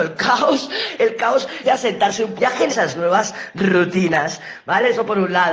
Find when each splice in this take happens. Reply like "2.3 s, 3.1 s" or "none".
1.6 s, 2.4 s, 2.7 s